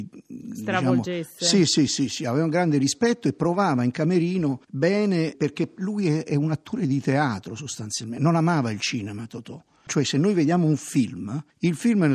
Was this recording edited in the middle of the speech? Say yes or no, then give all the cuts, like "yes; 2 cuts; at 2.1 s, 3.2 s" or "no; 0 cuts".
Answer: no; 0 cuts